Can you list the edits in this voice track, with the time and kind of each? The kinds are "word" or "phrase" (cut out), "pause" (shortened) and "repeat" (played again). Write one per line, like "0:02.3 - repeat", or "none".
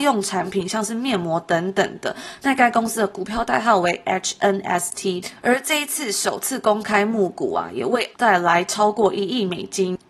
0:08.1 - word